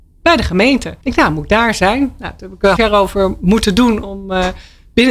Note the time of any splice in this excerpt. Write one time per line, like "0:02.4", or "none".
0:01.0
0:02.8